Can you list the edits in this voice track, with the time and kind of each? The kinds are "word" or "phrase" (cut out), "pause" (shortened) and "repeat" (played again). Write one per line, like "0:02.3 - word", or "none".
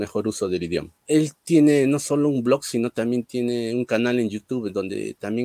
0:01.0 - pause